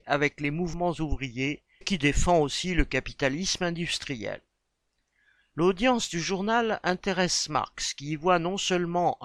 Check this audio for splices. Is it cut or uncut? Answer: cut